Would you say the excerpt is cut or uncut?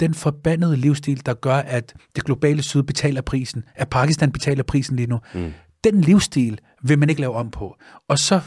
uncut